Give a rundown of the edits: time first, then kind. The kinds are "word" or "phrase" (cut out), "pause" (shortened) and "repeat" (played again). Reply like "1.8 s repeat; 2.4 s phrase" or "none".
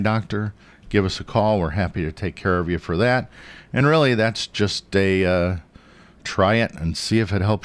none